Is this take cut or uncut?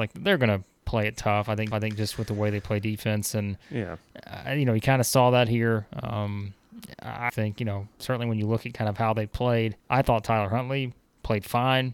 cut